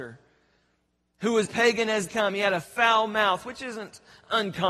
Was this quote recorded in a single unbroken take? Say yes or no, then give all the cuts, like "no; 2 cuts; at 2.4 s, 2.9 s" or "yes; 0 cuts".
no; 2 cuts; at 1.4 s, 2.1 s